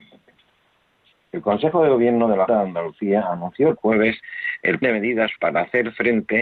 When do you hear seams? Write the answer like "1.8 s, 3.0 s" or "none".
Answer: 2.5 s, 3.8 s, 4.8 s, 5.4 s